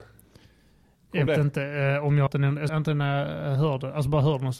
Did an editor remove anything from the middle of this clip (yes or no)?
yes